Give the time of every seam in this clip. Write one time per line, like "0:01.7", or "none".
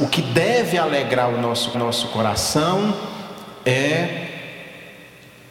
0:01.7